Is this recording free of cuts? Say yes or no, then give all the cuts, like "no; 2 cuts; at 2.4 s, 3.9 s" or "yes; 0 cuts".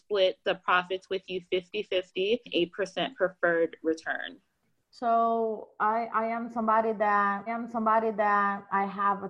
no; 2 cuts; at 2.5 s, 7.5 s